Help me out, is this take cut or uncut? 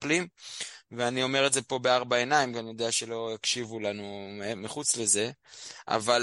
uncut